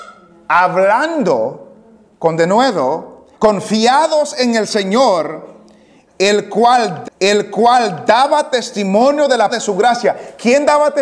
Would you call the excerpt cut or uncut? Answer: cut